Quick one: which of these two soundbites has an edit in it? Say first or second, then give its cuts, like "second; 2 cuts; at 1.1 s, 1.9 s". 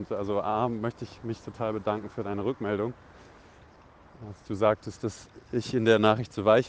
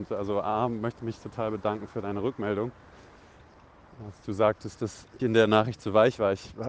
second; 2 cuts; at 1.0 s, 5.2 s